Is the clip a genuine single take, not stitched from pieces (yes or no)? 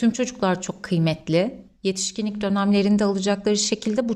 yes